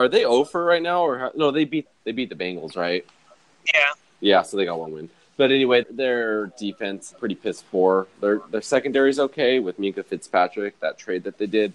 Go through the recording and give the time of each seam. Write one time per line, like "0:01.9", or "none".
0:01.9
0:05.8
0:07.1